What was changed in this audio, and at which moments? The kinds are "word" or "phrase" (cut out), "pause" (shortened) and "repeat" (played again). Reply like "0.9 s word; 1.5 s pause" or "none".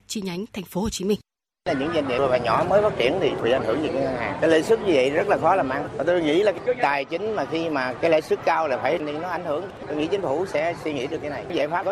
1.3 s pause